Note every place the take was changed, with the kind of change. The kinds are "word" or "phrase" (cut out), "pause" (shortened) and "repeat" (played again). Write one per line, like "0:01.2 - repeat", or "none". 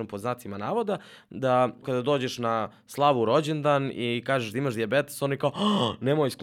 0:01.8 - word